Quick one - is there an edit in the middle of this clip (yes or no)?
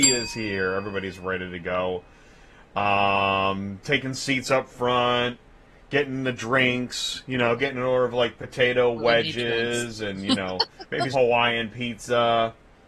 yes